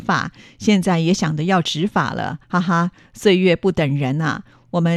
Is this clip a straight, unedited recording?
no; 1 cut; at 2.4 s

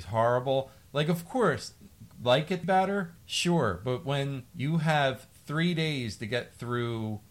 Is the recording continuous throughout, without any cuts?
no; 3 cuts; at 2.1 s, 2.6 s, 3.2 s

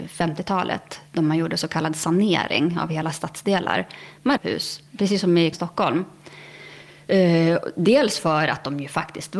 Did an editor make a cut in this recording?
yes; 2 cuts; at 4.4 s, 5.5 s

